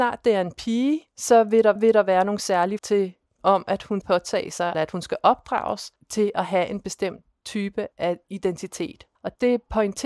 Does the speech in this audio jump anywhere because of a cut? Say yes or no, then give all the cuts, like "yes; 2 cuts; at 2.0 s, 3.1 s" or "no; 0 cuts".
yes; 9 cuts; at 1.1 s, 1.8 s, 2.8 s, 3.4 s, 4.0 s, 4.7 s, 6.0 s, 7.9 s, 9.2 s